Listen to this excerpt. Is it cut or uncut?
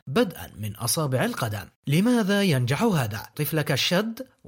cut